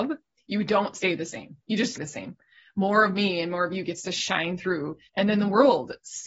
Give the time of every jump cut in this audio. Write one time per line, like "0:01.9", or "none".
0:02.0
0:05.1

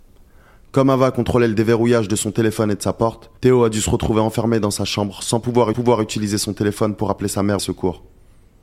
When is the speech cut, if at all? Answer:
0:03.4
0:05.7
0:07.6

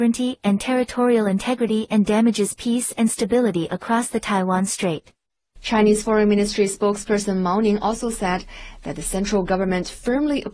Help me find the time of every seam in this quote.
none

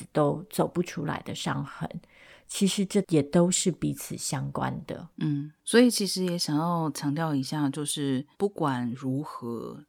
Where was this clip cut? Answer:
0:05.1
0:08.3

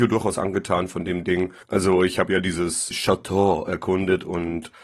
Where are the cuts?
0:01.6
0:02.9

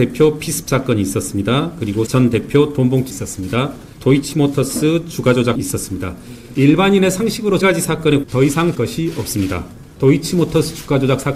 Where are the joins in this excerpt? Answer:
0:02.1
0:03.1
0:05.6
0:07.6
0:08.2
0:08.7

